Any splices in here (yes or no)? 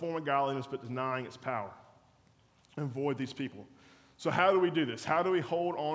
no